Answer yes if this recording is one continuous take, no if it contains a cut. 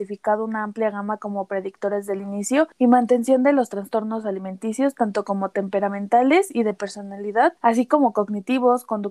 no